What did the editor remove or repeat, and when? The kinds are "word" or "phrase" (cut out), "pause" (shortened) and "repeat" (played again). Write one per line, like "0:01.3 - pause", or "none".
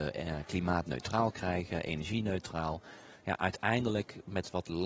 none